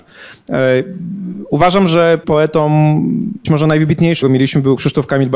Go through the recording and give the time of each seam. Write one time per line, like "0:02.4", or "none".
0:02.2
0:03.4
0:04.2